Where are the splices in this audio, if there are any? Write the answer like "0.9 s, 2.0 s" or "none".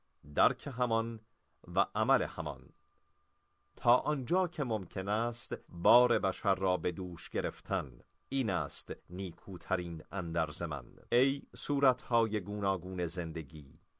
5.6 s, 8.2 s, 9.0 s, 11.1 s